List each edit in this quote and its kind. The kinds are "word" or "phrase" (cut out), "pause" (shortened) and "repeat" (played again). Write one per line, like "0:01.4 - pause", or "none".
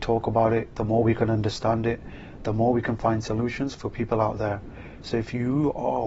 none